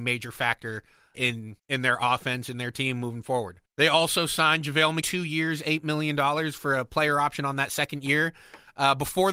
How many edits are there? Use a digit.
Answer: 4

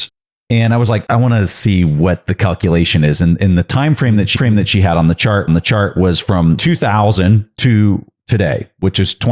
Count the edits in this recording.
2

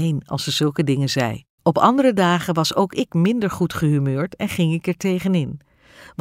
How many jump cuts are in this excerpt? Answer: 1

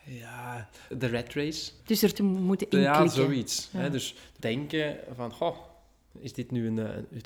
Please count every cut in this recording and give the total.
4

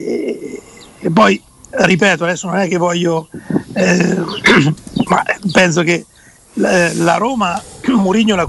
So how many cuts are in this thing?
0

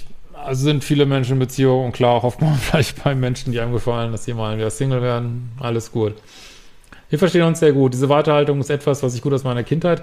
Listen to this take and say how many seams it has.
1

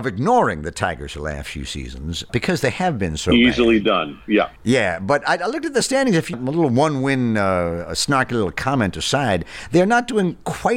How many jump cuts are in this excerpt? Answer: 3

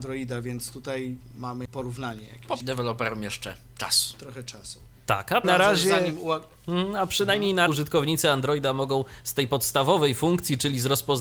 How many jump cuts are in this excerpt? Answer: 4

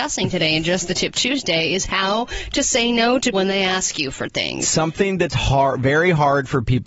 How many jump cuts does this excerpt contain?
1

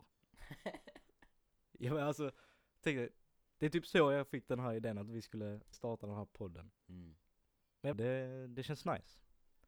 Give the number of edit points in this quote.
3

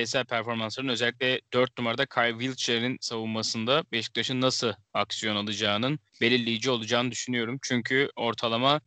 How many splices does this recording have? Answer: 1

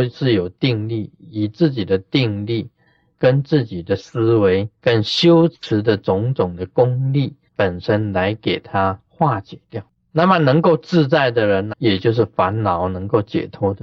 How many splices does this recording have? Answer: 3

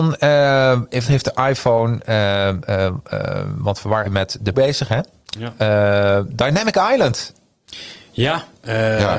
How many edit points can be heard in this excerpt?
3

